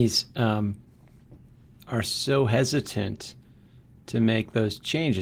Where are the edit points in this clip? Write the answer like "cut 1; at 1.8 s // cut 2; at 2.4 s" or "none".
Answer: none